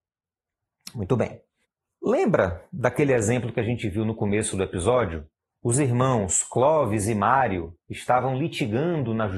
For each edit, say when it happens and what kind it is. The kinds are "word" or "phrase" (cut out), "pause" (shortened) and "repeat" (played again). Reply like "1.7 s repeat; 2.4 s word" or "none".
1.6 s pause; 5.4 s pause; 7.8 s pause